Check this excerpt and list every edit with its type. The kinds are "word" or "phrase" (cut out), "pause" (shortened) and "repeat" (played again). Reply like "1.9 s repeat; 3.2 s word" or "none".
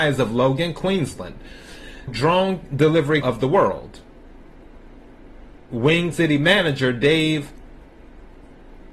2.1 s word; 3.2 s word; 6.1 s word